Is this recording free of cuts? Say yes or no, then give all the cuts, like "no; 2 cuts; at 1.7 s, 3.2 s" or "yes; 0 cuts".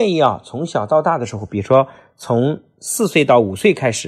yes; 0 cuts